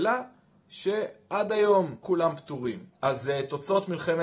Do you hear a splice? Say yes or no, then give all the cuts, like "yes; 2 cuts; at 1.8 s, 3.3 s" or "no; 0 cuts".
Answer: yes; 2 cuts; at 2.0 s, 2.9 s